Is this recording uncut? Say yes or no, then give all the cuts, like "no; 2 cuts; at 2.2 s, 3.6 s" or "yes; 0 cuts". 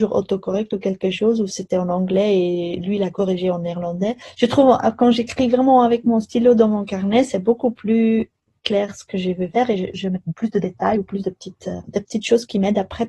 yes; 0 cuts